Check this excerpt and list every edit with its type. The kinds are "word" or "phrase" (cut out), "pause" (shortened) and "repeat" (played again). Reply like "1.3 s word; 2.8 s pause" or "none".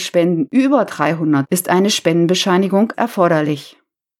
1.5 s word; 2.9 s word